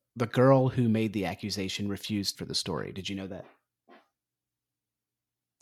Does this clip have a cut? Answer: yes; 1 cut; at 2.3 s

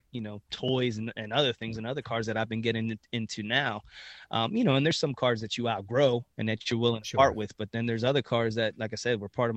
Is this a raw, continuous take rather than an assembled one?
no; 1 cut; at 6.3 s

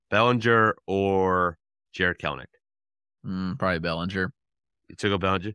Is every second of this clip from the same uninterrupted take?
yes; 0 cuts

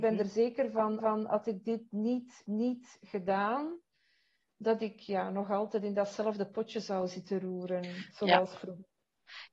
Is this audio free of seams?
no; 2 cuts; at 1.0 s, 2.4 s

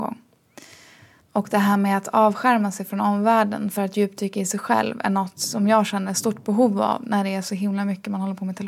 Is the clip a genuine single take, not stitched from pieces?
yes; 0 cuts

